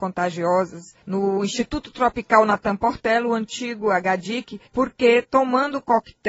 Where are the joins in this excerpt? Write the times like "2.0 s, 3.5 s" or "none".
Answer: 1.0 s, 4.7 s